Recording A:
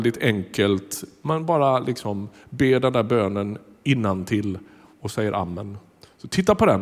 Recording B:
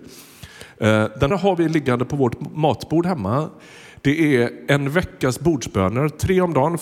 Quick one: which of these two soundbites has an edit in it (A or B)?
B